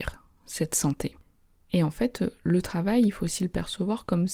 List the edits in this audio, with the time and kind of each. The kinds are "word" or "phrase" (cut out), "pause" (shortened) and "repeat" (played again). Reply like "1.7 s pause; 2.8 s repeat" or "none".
none